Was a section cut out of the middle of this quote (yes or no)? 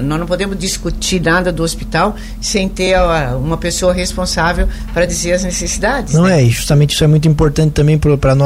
no